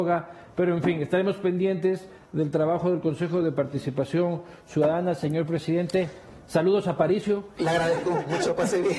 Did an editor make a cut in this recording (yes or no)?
no